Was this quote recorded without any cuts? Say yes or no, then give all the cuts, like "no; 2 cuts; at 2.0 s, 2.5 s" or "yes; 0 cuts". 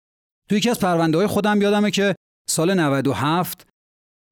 yes; 0 cuts